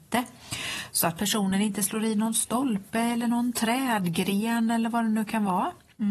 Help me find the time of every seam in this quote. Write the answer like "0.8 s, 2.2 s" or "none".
none